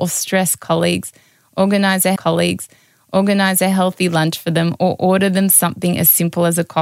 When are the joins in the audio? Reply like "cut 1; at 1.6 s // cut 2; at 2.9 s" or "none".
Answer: cut 1; at 2.2 s